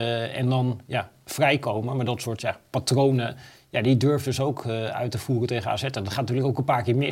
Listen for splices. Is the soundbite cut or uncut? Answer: uncut